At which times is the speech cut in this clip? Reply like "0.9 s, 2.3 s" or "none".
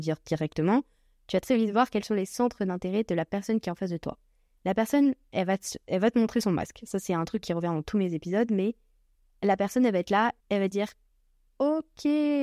10.4 s

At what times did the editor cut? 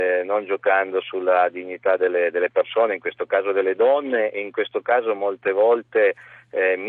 none

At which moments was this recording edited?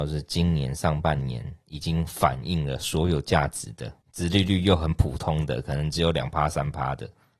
4.0 s

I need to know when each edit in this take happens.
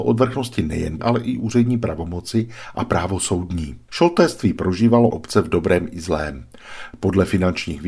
1.0 s, 5.1 s

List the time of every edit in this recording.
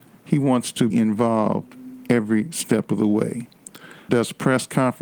0.9 s, 4.1 s

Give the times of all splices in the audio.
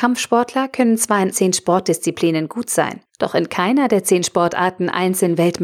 1.3 s, 3.1 s

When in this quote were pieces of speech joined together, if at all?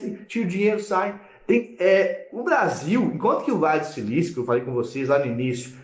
none

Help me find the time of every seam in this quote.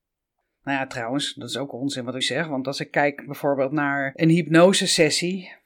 2.2 s

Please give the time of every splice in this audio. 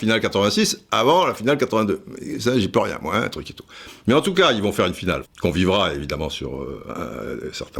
5.2 s

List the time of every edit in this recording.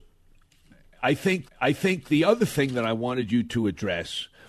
1.5 s

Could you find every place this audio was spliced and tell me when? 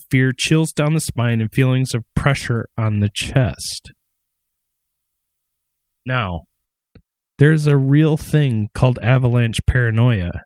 none

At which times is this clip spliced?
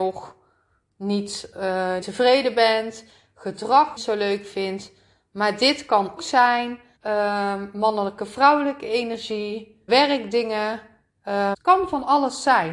2.0 s, 4.0 s, 6.2 s, 7.0 s, 9.9 s, 11.5 s

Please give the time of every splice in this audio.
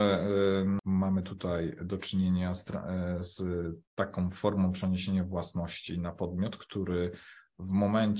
3.8 s

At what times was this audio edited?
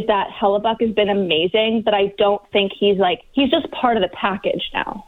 none

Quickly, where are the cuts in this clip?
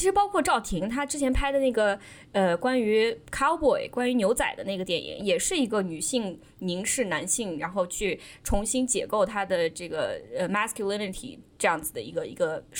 none

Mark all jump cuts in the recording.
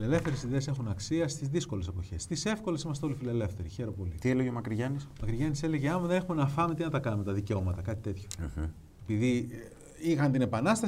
none

